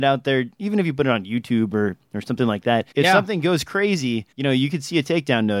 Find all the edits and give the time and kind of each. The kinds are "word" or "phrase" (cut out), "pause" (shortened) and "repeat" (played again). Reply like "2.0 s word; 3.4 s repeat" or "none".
2.9 s pause; 4.3 s pause